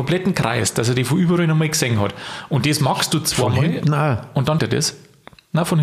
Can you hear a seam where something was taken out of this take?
yes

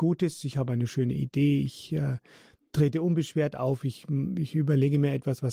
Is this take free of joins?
yes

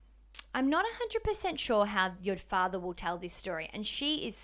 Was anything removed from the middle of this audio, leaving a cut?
no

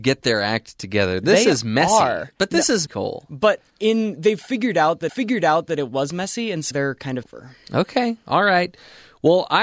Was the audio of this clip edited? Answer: yes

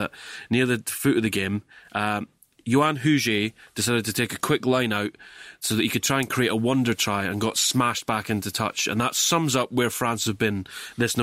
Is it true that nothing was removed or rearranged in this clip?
yes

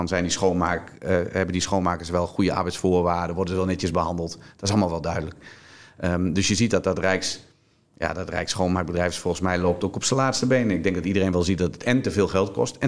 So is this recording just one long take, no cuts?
yes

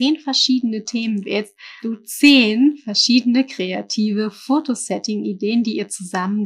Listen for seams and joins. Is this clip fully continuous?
no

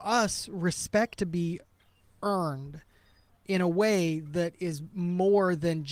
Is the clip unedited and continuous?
no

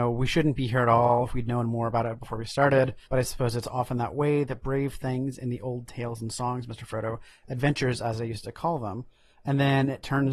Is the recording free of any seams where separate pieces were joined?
no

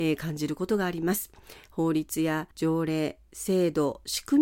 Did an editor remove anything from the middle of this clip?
yes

